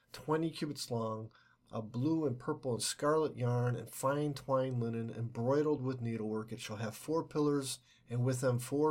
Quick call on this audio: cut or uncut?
uncut